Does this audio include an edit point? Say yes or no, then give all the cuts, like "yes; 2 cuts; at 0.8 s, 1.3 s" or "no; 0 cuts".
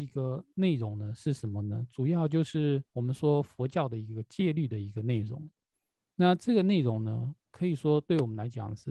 yes; 1 cut; at 2.9 s